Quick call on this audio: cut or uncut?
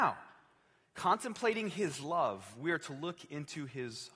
uncut